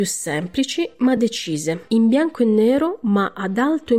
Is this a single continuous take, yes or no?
yes